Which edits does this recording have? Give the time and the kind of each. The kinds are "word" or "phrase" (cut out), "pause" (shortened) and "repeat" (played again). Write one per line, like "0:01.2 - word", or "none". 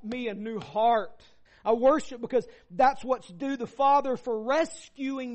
0:01.5 - pause